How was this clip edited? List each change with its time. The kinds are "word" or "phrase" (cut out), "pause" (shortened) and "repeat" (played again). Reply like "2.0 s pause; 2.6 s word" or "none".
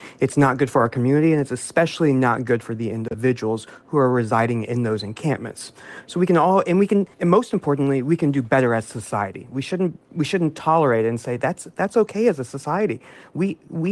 7.1 s pause

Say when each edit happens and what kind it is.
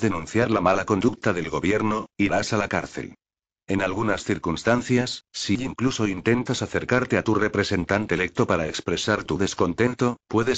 none

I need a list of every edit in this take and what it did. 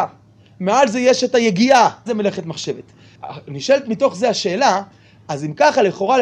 2.1 s word

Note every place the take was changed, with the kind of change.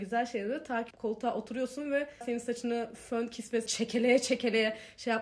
0.9 s word; 2.2 s word; 3.7 s word

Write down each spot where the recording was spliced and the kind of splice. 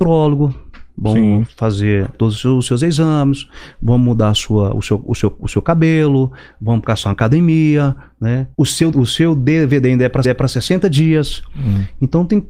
2.1 s word; 8.5 s pause; 8.9 s word; 10.2 s repeat

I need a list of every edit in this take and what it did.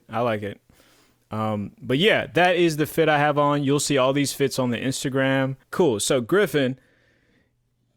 5.6 s pause

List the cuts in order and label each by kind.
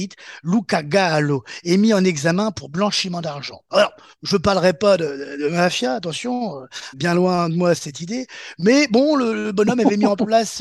6.9 s word

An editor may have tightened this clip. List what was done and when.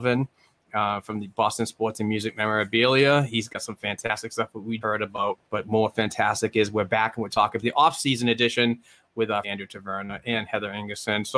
4.8 s word; 5.5 s pause; 7.6 s phrase; 9.4 s word

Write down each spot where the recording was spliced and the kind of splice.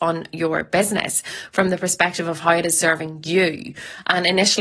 none

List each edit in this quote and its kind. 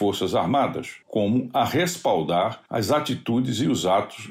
1.0 s pause; 2.6 s pause

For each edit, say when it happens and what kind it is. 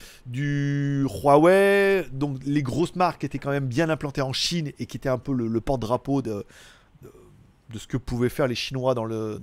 none

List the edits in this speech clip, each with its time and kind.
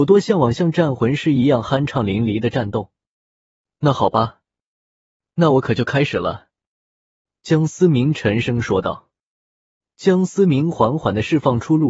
none

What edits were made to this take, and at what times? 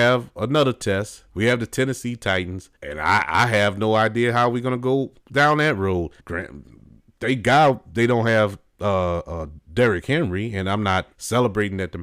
1.3 s pause; 2.8 s pause; 5.2 s pause; 6.2 s pause; 11.1 s pause

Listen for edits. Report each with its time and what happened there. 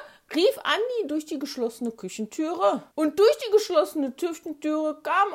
2.9 s pause

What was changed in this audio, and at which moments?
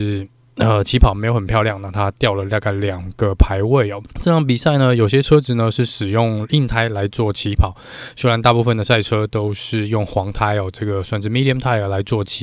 4.1 s pause

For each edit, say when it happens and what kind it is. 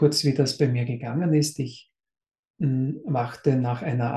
none

